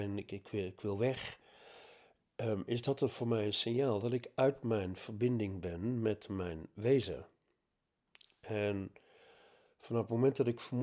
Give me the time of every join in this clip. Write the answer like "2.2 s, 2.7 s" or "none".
none